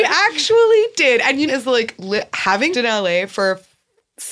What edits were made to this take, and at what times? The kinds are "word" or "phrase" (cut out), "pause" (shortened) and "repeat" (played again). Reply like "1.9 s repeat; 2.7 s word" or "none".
1.5 s phrase; 2.7 s word